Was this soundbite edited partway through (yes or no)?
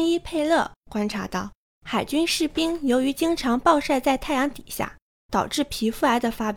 no